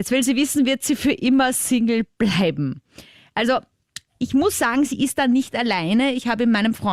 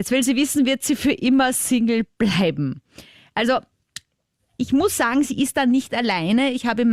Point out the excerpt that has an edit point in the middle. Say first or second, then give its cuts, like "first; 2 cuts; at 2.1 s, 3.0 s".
first; 1 cut; at 4.1 s